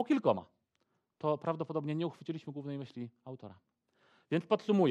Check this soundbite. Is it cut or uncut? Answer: uncut